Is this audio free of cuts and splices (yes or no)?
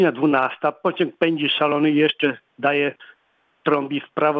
yes